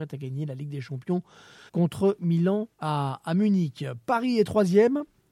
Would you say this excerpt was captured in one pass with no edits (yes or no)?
no